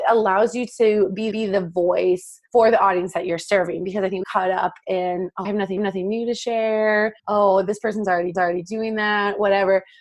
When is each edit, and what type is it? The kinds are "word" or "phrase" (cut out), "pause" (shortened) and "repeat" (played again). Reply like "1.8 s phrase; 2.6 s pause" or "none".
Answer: 1.3 s repeat; 2.5 s pause; 4.2 s word; 5.4 s word; 5.8 s repeat; 7.2 s pause; 8.3 s repeat